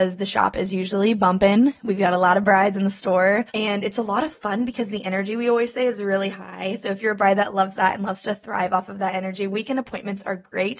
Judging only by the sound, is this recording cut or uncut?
cut